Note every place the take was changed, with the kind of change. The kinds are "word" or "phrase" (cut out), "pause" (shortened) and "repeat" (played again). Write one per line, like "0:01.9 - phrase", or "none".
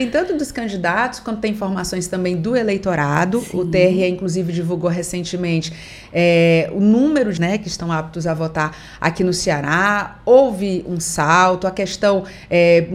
0:07.4 - word